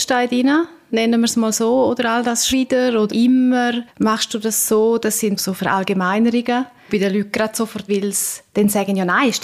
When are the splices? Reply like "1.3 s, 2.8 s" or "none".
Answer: 2.5 s, 3.1 s, 3.9 s, 5.4 s, 6.9 s, 7.9 s